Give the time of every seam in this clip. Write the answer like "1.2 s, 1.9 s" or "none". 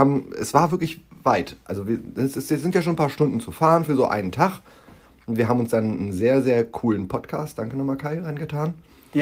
none